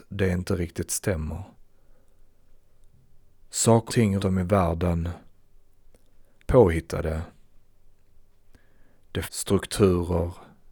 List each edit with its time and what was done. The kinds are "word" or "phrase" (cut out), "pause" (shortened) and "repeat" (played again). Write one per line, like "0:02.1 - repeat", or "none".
0:03.9 - word
0:04.2 - word
0:06.4 - word
0:09.2 - word